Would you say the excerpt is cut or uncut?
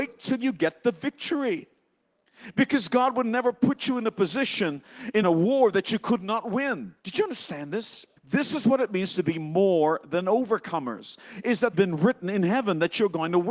cut